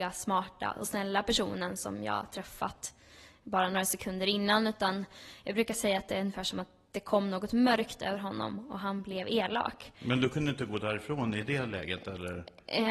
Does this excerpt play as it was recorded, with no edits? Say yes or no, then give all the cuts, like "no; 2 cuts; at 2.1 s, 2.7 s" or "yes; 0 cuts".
yes; 0 cuts